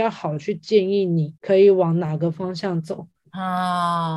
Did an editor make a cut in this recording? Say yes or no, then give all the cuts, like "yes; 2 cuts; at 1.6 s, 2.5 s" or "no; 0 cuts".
yes; 1 cut; at 1.4 s